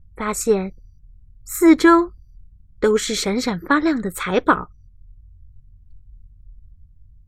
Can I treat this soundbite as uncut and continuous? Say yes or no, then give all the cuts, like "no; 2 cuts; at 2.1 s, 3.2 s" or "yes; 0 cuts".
yes; 0 cuts